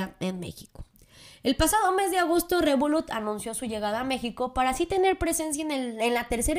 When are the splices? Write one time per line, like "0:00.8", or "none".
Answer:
none